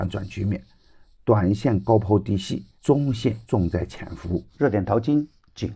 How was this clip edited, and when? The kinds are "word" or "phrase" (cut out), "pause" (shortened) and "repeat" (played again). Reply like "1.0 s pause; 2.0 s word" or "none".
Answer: 2.8 s pause; 3.4 s pause; 4.5 s pause